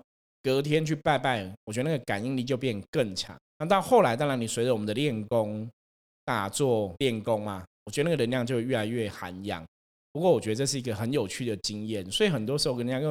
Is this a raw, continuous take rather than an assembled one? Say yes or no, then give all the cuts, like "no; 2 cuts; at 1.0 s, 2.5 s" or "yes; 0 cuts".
no; 2 cuts; at 3.5 s, 7.0 s